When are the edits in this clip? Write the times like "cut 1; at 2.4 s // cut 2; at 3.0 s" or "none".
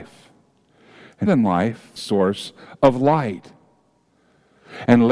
cut 1; at 1.3 s // cut 2; at 2.0 s